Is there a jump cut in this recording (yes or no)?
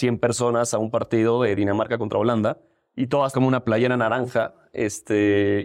yes